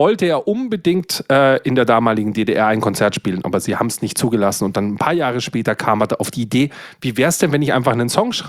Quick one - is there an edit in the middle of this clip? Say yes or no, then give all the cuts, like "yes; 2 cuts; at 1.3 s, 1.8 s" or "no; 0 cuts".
no; 0 cuts